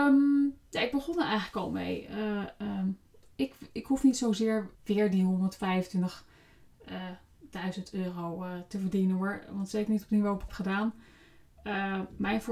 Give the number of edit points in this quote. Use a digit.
3